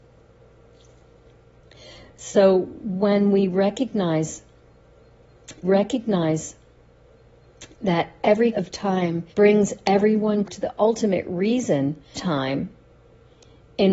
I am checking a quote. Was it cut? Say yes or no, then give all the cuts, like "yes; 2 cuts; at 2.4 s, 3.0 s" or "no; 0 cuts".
yes; 5 cuts; at 5.6 s, 8.5 s, 9.3 s, 10.5 s, 12.1 s